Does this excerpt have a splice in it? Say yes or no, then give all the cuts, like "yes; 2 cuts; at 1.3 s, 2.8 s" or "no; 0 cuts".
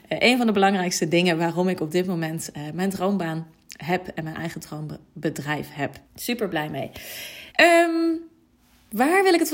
yes; 2 cuts; at 6.0 s, 7.5 s